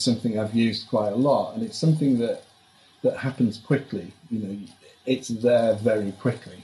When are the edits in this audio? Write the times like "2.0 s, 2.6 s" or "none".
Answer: none